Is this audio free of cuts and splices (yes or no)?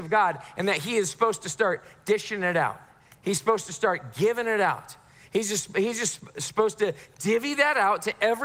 yes